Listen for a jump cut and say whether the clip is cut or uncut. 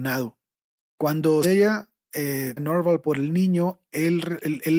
cut